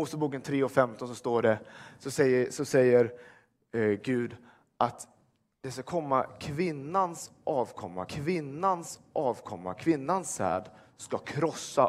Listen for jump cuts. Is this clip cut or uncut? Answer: cut